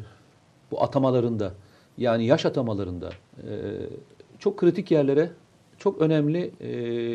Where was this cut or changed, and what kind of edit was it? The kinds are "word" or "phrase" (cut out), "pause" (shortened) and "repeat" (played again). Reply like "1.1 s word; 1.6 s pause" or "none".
3.3 s pause